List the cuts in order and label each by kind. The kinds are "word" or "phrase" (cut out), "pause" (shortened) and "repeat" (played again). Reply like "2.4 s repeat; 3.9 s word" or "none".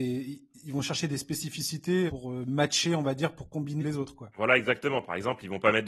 2.1 s phrase; 3.8 s word

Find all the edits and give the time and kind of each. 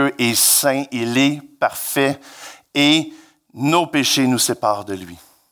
none

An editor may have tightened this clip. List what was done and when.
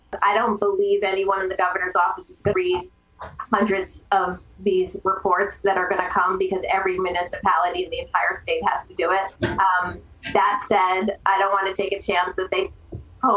2.5 s word; 9.4 s pause

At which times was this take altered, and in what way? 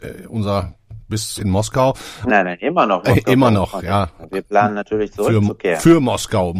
1.4 s phrase; 2.3 s word

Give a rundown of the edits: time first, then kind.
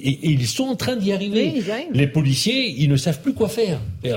none

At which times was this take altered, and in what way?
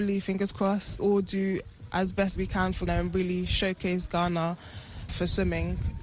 1.0 s word; 2.4 s word; 2.9 s word; 5.1 s word

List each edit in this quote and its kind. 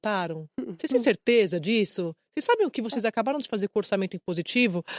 none

